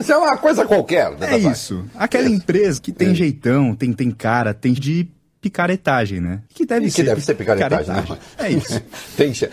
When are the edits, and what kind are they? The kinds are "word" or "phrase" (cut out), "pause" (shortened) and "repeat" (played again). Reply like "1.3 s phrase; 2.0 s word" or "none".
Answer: 2.8 s word; 3.9 s repeat; 4.8 s word; 6.5 s pause